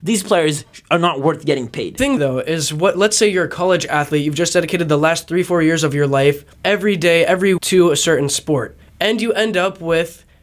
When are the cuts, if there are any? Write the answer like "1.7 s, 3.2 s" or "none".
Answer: 2.2 s, 6.5 s, 7.6 s, 8.8 s